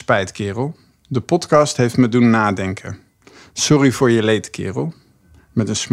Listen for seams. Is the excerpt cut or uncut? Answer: uncut